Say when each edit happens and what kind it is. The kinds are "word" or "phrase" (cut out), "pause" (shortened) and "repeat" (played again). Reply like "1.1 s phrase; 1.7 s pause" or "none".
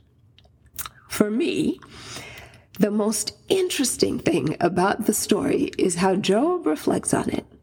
none